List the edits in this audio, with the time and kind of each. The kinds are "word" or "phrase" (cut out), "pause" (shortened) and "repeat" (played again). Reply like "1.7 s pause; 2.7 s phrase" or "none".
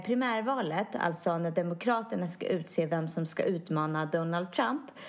none